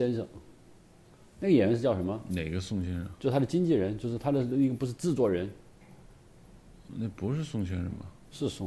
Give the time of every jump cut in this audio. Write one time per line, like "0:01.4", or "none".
0:06.9